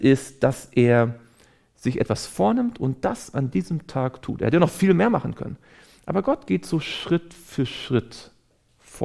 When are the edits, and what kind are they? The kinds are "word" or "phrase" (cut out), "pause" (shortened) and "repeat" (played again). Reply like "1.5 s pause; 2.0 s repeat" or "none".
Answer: none